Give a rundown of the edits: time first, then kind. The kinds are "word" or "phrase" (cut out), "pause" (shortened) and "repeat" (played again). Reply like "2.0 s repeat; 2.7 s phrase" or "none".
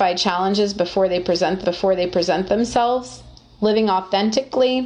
1.6 s repeat